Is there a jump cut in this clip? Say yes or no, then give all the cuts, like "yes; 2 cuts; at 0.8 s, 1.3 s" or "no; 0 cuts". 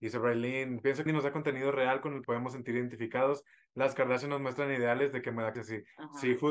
yes; 3 cuts; at 1.1 s, 2.2 s, 5.5 s